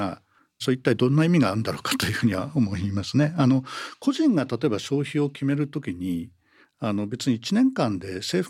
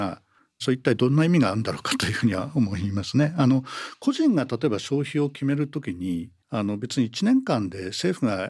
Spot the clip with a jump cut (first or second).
second